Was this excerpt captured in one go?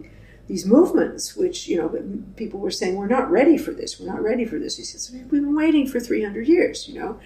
yes; 0 cuts

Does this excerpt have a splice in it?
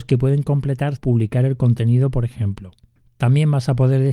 yes; 1 cut; at 1.0 s

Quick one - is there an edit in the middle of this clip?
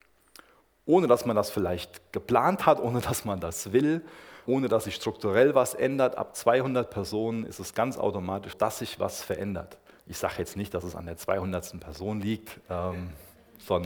yes; 3 cuts; at 4.5 s, 8.5 s, 9.9 s

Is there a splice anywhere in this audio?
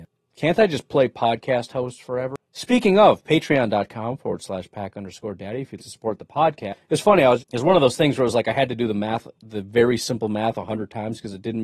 yes; 3 cuts; at 2.4 s, 5.8 s, 7.4 s

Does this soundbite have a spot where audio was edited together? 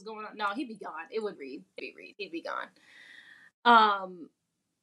yes; 2 cuts; at 1.4 s, 1.8 s

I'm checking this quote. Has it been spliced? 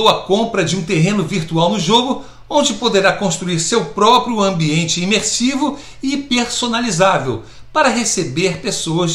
no; 0 cuts

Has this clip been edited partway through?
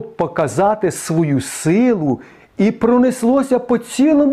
no; 0 cuts

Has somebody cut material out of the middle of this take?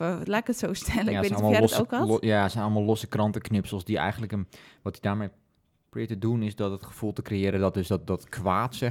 no; 0 cuts

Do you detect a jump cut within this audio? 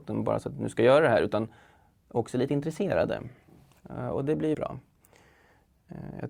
yes; 1 cut; at 4.5 s

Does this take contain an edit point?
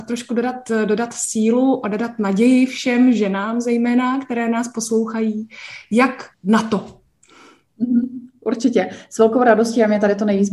yes; 1 cut; at 6.3 s

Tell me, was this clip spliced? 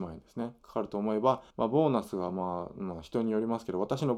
yes; 1 cut; at 1.5 s

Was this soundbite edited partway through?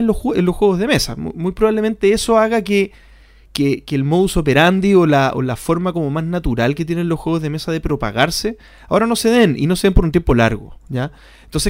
no; 0 cuts

